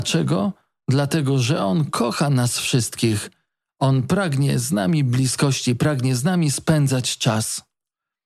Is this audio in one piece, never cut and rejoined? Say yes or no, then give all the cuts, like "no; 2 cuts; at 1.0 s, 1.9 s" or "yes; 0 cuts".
yes; 0 cuts